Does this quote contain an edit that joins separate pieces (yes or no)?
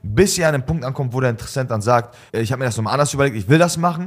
yes